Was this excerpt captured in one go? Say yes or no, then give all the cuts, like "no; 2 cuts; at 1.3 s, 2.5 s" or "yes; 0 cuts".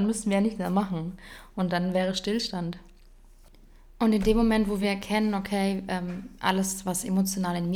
yes; 0 cuts